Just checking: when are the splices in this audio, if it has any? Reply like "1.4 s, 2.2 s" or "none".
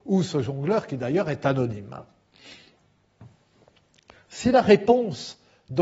none